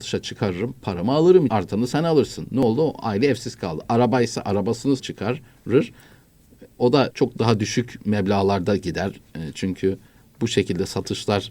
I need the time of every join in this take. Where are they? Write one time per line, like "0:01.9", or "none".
0:01.5
0:05.0
0:07.1